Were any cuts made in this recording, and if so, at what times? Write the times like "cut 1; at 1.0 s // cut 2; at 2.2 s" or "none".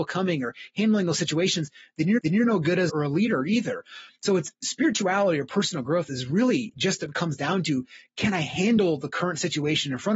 cut 1; at 2.2 s // cut 2; at 2.9 s